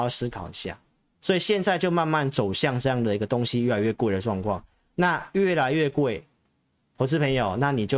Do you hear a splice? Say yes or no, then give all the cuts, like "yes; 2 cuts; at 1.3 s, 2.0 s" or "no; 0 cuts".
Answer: no; 0 cuts